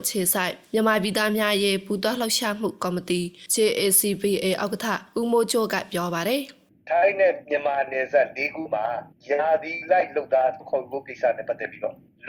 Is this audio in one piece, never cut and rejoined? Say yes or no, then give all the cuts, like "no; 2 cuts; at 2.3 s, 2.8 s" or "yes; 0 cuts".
yes; 0 cuts